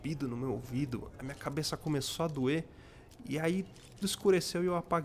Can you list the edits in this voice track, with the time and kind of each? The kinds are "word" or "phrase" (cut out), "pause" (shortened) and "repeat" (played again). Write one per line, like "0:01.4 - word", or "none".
0:04.0 - word